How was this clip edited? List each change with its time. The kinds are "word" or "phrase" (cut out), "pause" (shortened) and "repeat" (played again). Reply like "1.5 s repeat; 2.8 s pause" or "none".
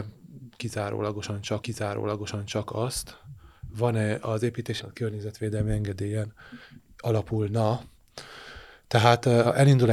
1.6 s repeat; 4.8 s phrase